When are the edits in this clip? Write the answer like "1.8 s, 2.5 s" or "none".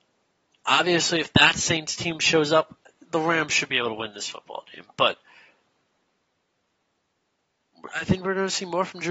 none